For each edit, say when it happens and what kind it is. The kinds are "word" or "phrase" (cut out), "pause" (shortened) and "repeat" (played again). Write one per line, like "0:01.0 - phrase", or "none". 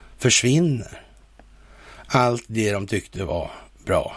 none